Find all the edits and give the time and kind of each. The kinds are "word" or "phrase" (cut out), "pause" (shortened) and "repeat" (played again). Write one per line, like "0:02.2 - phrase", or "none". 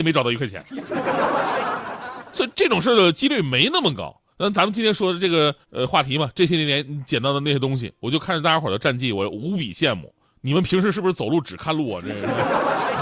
0:04.3 - pause
0:05.6 - pause
0:10.3 - pause